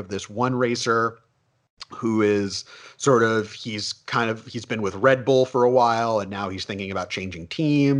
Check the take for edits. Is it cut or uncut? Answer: uncut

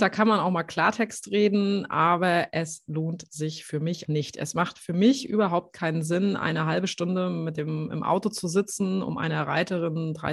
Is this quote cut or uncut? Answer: cut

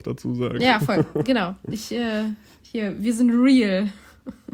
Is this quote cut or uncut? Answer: uncut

